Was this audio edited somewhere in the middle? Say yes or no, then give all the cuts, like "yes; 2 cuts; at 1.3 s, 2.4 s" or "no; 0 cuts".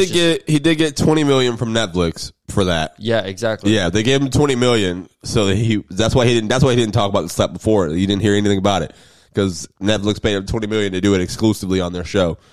no; 0 cuts